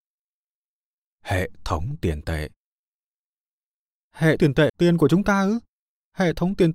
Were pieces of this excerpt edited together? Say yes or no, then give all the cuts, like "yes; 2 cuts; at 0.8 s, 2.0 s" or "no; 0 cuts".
yes; 2 cuts; at 4.4 s, 4.7 s